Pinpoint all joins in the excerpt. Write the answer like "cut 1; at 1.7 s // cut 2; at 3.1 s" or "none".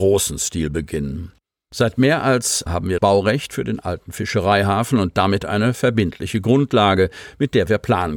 cut 1; at 2.7 s // cut 2; at 3.0 s